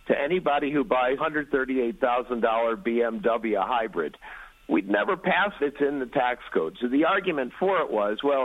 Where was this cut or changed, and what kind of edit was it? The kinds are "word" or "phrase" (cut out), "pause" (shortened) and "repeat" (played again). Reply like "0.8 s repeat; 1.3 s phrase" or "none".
1.2 s word; 5.6 s phrase